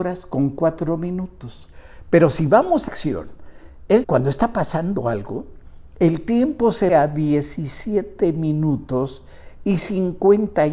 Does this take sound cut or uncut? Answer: cut